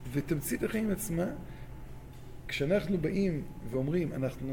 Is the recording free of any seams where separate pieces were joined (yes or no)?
yes